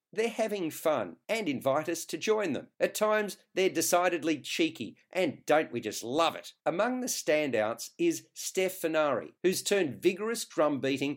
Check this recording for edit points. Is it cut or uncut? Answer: cut